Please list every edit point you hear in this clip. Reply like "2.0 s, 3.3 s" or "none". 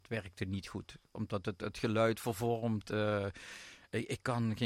none